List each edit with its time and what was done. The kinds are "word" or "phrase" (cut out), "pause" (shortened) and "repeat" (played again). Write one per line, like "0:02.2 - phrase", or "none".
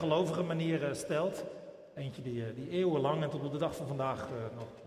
none